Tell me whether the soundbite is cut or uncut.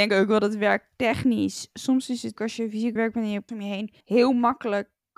cut